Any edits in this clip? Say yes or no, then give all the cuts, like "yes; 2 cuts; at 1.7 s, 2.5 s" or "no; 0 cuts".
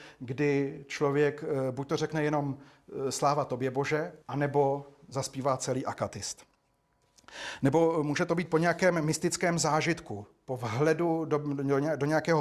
yes; 1 cut; at 4.2 s